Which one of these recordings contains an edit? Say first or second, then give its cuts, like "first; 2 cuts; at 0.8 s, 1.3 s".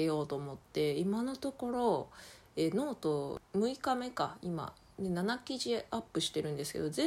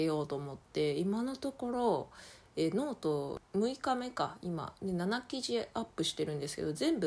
second; 1 cut; at 4.8 s